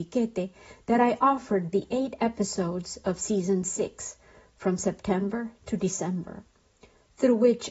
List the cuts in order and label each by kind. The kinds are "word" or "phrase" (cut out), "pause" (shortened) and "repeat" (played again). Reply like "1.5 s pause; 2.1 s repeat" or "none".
1.7 s word

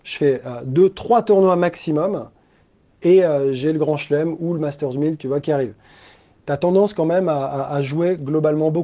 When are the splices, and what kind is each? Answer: none

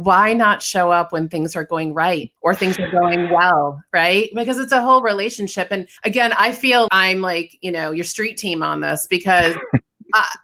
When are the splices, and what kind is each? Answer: 2.4 s pause; 6.0 s pause; 6.9 s word

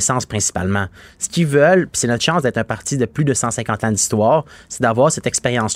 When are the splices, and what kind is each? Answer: none

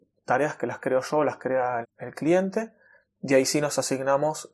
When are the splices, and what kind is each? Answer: 1.8 s word

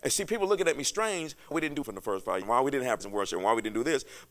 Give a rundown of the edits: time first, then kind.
1.5 s word; 1.8 s word; 2.4 s word; 3.0 s word

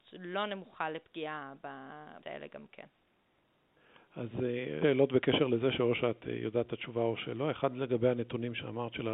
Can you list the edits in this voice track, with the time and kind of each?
2.2 s word; 4.8 s word

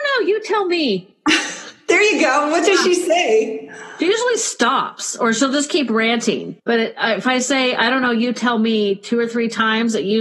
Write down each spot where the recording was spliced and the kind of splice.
1.1 s pause; 6.6 s pause

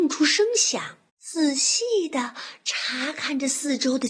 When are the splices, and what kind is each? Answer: 1.1 s pause

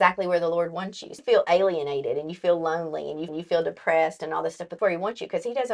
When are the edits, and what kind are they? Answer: 1.2 s word; 3.3 s repeat; 4.8 s phrase

